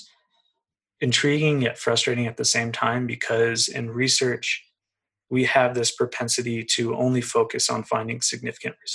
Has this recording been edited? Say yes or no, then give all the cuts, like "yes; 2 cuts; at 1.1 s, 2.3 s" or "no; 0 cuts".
no; 0 cuts